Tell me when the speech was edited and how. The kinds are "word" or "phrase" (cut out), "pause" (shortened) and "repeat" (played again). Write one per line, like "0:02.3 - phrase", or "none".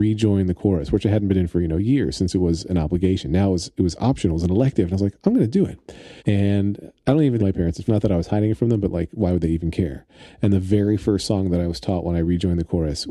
0:06.2 - pause
0:07.4 - phrase
0:07.9 - word